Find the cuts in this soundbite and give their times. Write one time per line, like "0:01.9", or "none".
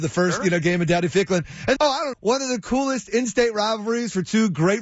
0:01.8
0:02.1